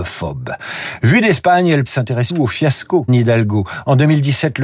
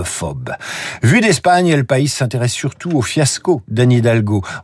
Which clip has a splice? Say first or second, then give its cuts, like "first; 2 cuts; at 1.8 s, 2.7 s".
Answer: first; 3 cuts; at 1.9 s, 2.3 s, 3.1 s